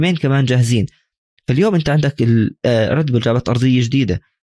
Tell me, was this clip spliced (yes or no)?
no